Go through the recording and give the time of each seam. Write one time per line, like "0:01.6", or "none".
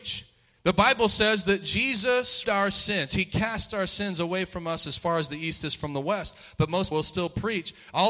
0:02.4
0:06.9